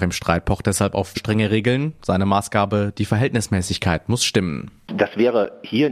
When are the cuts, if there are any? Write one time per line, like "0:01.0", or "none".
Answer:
0:01.1